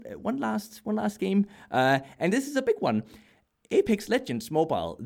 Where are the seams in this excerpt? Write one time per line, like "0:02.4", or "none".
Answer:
none